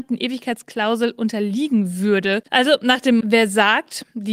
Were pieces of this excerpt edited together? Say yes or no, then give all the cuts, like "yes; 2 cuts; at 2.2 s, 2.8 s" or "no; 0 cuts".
yes; 2 cuts; at 2.5 s, 3.2 s